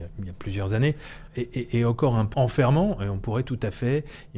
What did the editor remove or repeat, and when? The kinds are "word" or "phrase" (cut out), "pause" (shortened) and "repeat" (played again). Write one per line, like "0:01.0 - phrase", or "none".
0:01.3 - word
0:02.3 - word